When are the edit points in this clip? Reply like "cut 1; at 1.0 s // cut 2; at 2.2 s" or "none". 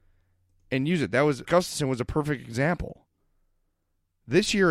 cut 1; at 1.4 s